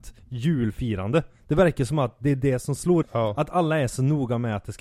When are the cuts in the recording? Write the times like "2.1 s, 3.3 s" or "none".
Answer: 3.0 s